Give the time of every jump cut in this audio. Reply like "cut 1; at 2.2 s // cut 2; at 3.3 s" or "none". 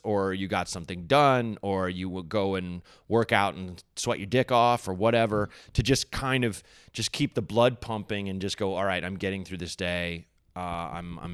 none